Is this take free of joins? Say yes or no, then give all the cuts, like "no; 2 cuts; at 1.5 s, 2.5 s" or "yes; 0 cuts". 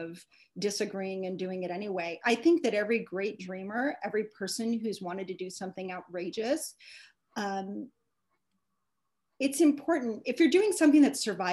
yes; 0 cuts